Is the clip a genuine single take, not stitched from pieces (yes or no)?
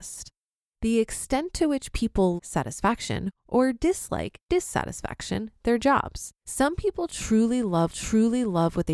no